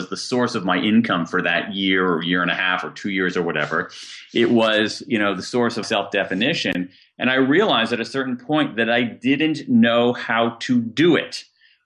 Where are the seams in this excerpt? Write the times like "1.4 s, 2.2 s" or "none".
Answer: 5.8 s